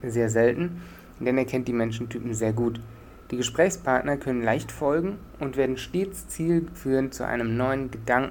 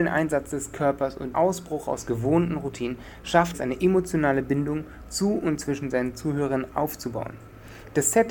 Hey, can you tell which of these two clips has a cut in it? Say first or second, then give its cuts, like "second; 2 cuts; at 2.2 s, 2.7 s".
second; 2 cuts; at 1.3 s, 3.5 s